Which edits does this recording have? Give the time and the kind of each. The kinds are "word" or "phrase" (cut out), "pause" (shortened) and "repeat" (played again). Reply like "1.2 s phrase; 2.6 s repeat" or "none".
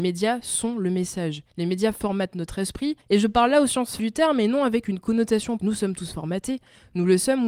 1.5 s pause; 3.0 s pause; 4.0 s word; 5.6 s word